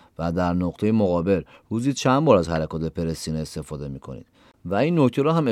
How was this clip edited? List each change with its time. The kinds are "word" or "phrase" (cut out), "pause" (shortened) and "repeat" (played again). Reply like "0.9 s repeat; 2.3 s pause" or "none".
none